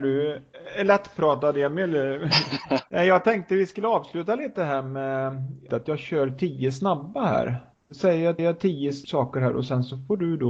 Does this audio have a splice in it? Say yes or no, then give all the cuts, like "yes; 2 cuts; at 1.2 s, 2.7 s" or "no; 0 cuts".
yes; 1 cut; at 8.4 s